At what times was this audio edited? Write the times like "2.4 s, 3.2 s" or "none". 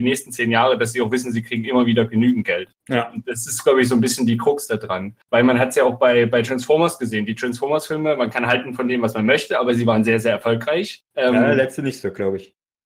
2.8 s, 5.2 s, 11.1 s